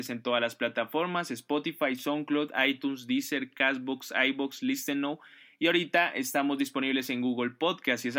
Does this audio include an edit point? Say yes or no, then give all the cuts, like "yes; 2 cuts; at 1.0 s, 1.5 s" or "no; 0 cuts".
no; 0 cuts